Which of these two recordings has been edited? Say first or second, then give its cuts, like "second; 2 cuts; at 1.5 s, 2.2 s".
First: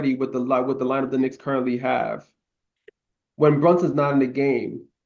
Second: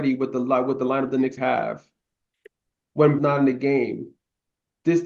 second; 2 cuts; at 1.4 s, 3.2 s